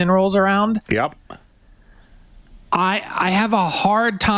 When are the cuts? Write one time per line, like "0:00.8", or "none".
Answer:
0:02.6